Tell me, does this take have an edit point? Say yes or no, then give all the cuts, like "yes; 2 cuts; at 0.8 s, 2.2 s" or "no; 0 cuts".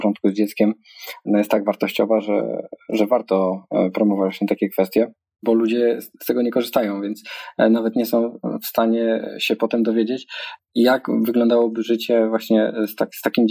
no; 0 cuts